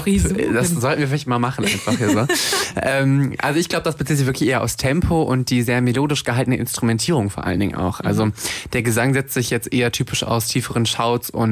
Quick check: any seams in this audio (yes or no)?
no